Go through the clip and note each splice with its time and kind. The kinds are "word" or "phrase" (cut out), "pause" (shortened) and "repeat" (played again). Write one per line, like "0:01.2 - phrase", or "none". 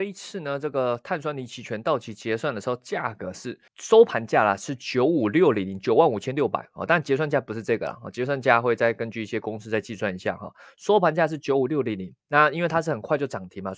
0:03.7 - pause
0:12.2 - pause